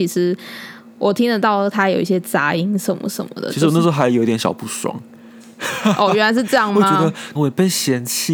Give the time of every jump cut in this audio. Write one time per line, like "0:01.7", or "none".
0:07.4